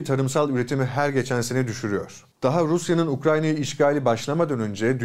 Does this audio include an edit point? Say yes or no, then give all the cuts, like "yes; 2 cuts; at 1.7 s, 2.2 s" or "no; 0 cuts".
yes; 1 cut; at 2.3 s